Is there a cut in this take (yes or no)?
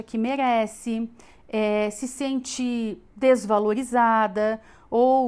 no